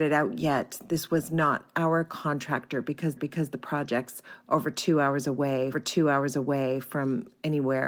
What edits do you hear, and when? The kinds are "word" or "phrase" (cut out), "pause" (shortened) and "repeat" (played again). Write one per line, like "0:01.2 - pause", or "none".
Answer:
0:03.2 - repeat
0:05.7 - repeat